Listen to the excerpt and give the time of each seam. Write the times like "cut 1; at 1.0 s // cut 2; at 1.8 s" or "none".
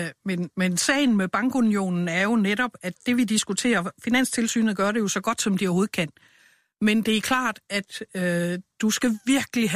none